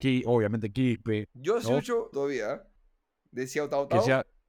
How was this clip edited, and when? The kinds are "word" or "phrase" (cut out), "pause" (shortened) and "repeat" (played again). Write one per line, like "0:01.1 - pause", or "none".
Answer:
0:02.1 - phrase
0:02.8 - pause